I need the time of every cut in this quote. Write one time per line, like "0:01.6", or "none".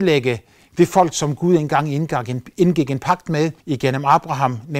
0:03.6